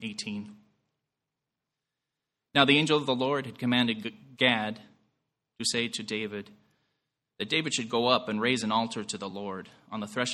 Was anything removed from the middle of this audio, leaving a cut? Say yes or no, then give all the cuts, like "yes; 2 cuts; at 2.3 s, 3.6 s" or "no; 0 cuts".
no; 0 cuts